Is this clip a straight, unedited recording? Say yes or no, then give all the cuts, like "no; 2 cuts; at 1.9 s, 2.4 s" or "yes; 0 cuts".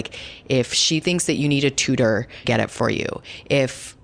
no; 1 cut; at 2.4 s